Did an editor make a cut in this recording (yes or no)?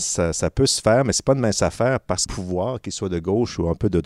yes